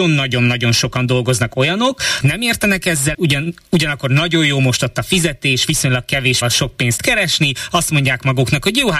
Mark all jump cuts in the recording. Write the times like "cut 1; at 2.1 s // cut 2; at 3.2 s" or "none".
cut 1; at 2.2 s // cut 2; at 3.1 s // cut 3; at 6.4 s // cut 4; at 7.0 s